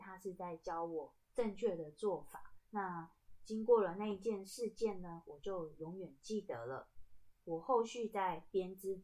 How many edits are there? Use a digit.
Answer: 1